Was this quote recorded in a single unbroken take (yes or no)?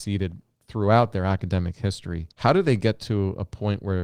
no